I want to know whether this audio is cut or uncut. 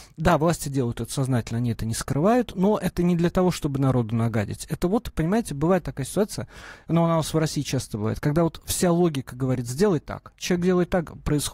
uncut